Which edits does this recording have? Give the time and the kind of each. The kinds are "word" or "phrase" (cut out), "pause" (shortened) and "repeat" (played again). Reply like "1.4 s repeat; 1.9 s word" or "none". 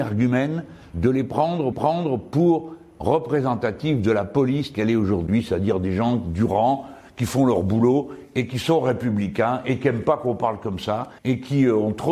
1.7 s repeat; 4.7 s word; 11.2 s pause